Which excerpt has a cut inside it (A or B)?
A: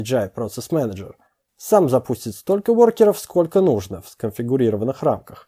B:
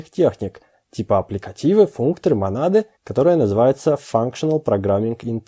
B